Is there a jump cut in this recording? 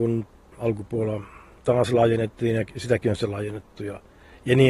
no; 0 cuts

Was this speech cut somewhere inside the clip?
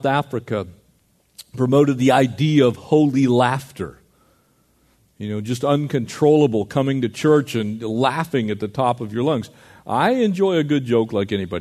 no; 0 cuts

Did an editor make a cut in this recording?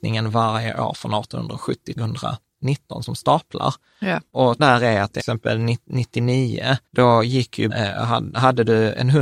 yes; 5 cuts; at 2.0 s, 4.6 s, 5.2 s, 6.9 s, 7.7 s

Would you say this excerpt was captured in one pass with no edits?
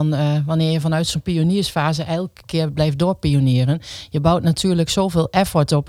yes; 0 cuts

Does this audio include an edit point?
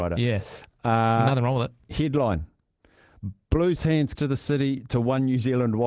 yes; 2 cuts; at 3.8 s, 4.1 s

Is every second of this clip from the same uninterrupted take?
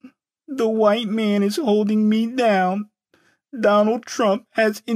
yes; 0 cuts

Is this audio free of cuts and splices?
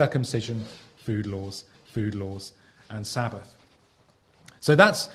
no; 1 cut; at 1.7 s

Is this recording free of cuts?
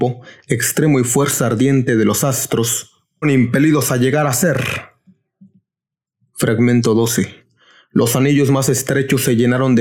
no; 1 cut; at 3.2 s

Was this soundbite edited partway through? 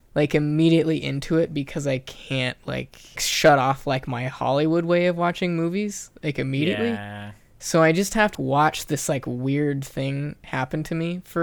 yes; 2 cuts; at 3.2 s, 8.3 s

